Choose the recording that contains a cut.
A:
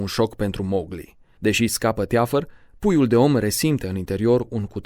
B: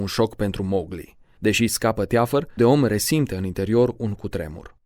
B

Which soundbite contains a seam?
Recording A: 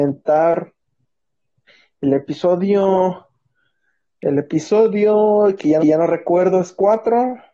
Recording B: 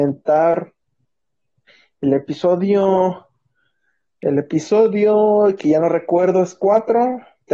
A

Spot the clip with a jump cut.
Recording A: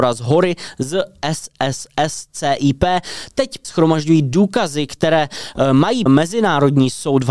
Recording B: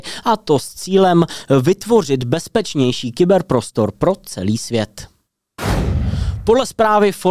A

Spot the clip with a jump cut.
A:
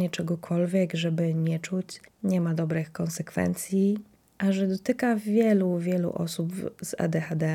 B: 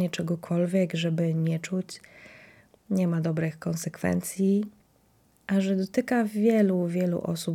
A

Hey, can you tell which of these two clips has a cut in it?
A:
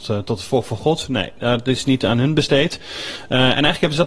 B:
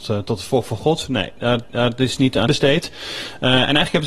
B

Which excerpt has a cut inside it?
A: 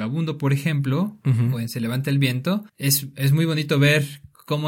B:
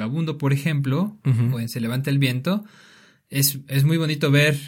A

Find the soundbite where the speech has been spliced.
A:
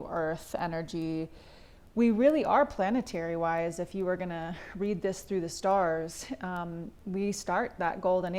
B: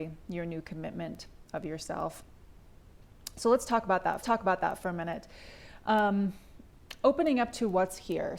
B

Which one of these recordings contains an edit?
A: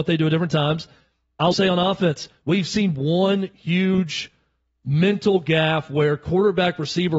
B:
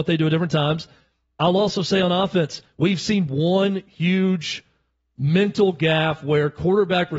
A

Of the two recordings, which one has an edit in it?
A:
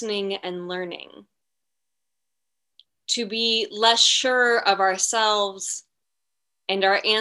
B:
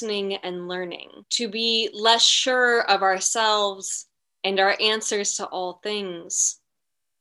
B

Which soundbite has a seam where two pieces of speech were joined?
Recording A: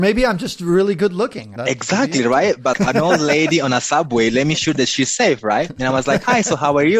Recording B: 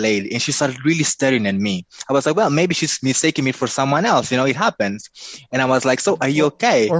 A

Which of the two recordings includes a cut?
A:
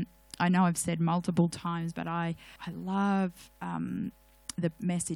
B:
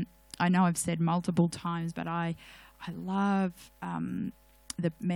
A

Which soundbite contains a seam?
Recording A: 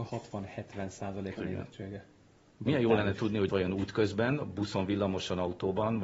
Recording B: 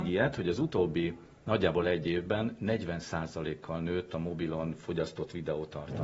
A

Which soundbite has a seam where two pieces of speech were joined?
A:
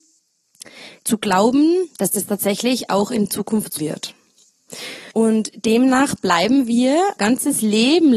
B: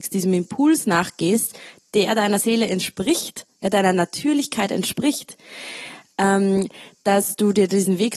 A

